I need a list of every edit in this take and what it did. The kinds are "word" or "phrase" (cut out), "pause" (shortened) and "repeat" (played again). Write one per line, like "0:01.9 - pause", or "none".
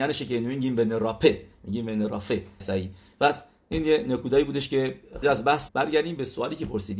0:02.6 - word
0:05.2 - word
0:05.7 - word

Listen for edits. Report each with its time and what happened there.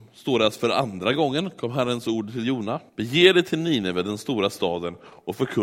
0:02.9 - pause

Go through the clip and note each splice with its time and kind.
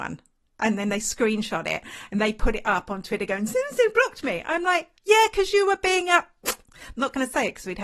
0:05.0 - pause

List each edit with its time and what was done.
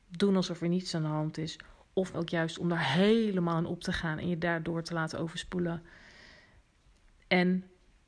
0:02.1 - word

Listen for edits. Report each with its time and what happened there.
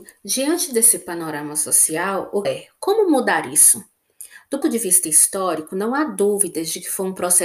0:02.4 - word
0:04.6 - word

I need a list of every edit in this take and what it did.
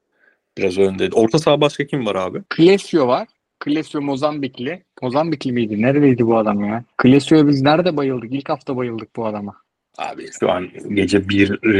0:02.5 - pause
0:03.4 - pause
0:06.9 - pause
0:09.7 - pause

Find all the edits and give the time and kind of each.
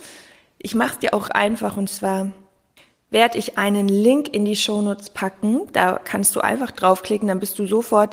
0:01.3 - word

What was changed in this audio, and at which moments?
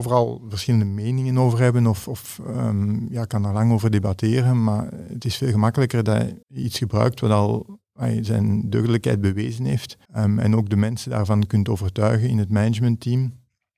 0:06.4 - pause
0:10.0 - pause

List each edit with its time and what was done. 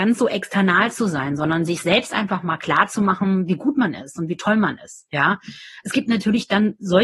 none

